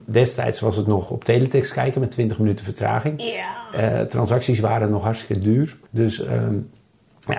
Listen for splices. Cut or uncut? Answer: cut